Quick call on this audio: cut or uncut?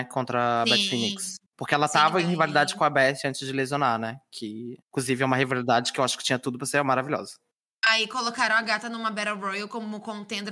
cut